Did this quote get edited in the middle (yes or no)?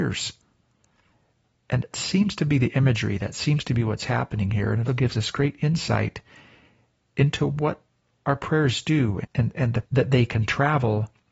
yes